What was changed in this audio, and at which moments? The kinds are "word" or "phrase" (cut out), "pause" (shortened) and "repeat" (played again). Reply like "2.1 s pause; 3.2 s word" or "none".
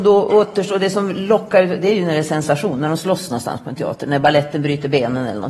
none